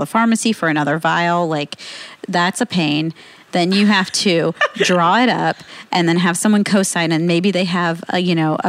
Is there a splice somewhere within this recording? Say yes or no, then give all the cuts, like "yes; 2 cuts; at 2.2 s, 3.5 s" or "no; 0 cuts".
no; 0 cuts